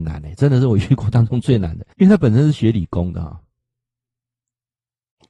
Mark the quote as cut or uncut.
cut